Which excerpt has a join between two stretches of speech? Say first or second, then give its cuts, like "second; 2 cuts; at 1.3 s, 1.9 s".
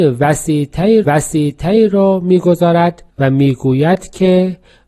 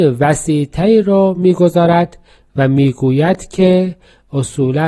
first; 2 cuts; at 1.0 s, 3.1 s